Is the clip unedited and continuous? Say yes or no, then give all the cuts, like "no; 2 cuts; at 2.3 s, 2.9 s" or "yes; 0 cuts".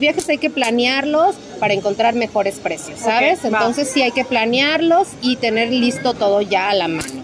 yes; 0 cuts